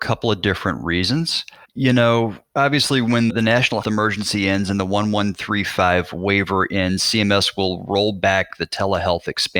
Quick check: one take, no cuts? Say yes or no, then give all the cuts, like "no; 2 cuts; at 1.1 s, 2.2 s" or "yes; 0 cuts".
no; 3 cuts; at 1.6 s, 3.3 s, 3.8 s